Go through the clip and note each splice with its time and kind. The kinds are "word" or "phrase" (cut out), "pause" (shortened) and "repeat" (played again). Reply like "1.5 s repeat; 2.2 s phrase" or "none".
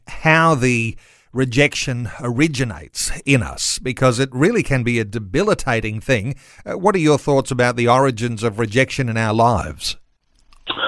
none

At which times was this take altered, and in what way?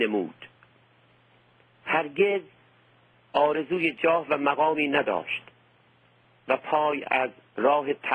none

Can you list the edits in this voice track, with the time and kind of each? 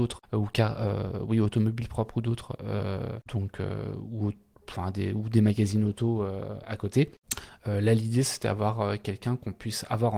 none

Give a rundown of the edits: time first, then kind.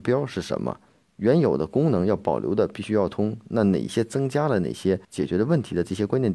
5.0 s pause

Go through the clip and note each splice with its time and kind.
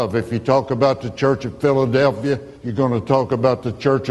2.6 s pause

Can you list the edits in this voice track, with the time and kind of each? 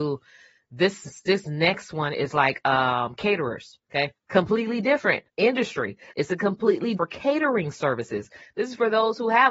4.2 s pause; 5.3 s pause; 7.0 s phrase

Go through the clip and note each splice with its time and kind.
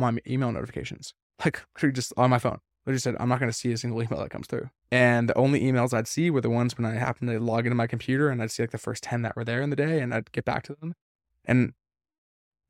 1.3 s pause; 4.8 s pause

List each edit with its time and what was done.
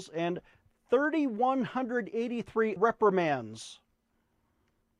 2.8 s word

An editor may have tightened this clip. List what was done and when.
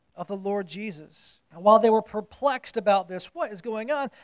1.4 s pause

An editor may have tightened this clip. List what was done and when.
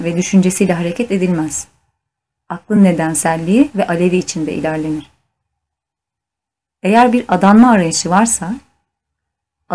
none

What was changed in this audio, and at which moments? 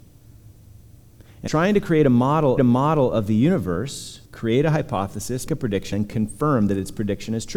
1.5 s word; 2.6 s repeat; 4.3 s pause; 5.5 s word; 5.9 s word

